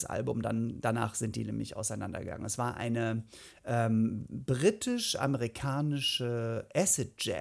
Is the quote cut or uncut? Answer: uncut